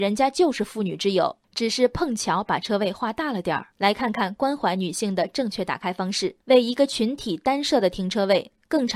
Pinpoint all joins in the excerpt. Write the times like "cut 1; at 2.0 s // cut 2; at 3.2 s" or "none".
cut 1; at 1.4 s // cut 2; at 3.7 s // cut 3; at 6.4 s